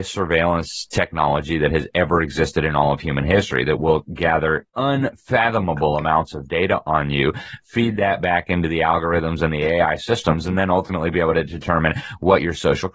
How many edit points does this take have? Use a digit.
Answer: 1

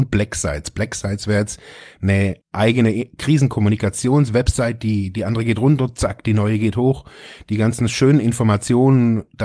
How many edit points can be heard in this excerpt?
1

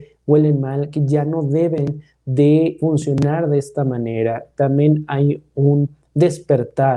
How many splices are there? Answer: 1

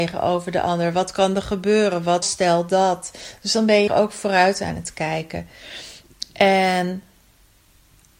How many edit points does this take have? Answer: 2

